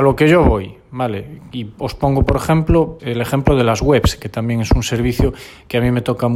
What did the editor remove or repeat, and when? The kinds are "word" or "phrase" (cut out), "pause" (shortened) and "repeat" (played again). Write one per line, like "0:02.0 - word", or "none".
0:03.0 - word